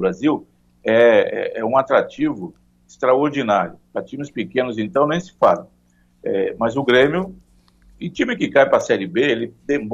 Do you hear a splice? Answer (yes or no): no